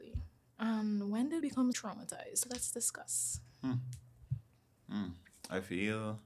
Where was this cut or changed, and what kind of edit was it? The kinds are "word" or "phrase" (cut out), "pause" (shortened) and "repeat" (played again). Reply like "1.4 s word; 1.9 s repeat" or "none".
1.4 s word; 1.7 s word

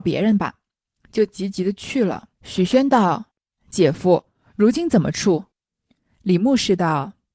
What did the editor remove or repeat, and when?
2.4 s pause; 3.3 s pause; 5.5 s pause

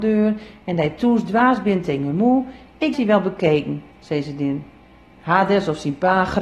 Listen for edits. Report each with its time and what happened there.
2.9 s word; 3.9 s pause; 4.8 s pause

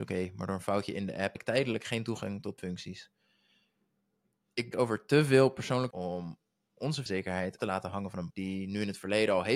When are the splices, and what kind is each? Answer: 1.4 s word; 2.6 s word; 4.7 s word; 5.9 s word; 7.1 s word; 7.6 s word; 8.3 s word

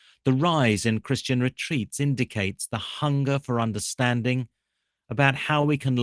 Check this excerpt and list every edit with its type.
none

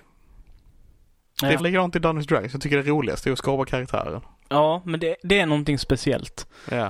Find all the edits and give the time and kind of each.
1.6 s word

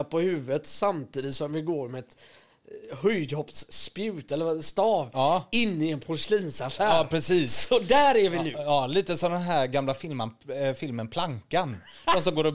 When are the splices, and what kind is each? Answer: none

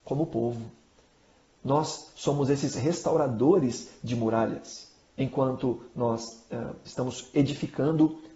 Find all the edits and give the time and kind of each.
none

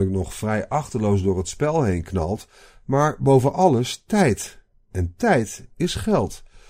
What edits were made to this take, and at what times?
none

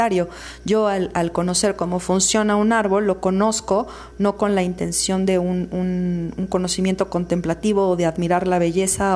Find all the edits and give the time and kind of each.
none

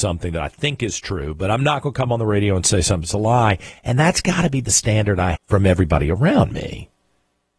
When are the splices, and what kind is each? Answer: 5.3 s word

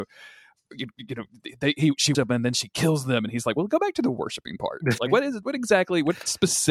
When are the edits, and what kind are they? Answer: 2.1 s word; 5.0 s word

